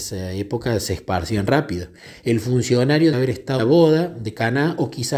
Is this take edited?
yes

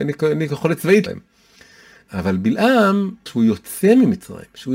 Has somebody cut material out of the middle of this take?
yes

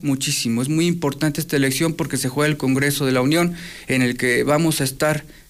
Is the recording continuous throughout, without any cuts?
yes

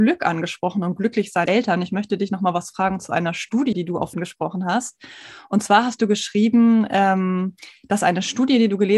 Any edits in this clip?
yes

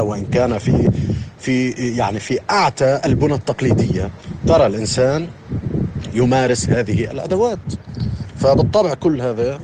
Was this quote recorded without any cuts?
yes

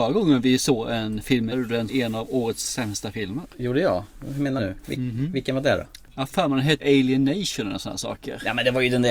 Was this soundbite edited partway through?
yes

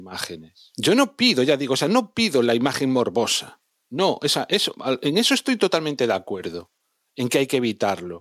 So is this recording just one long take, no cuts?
yes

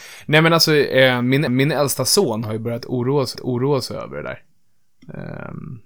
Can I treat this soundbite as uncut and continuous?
no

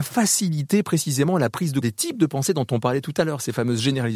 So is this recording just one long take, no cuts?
no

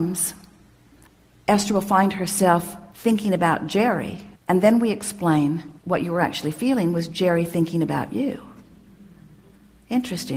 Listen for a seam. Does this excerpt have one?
yes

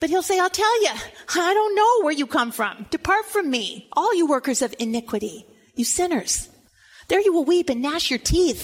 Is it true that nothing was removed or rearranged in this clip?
yes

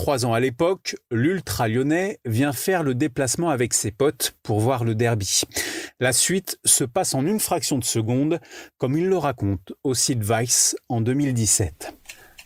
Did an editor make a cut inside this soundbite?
no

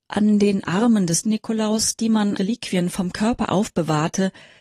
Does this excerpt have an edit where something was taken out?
yes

